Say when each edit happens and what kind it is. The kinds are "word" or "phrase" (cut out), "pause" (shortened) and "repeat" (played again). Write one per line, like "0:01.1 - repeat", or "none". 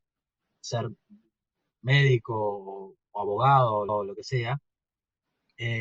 0:03.9 - repeat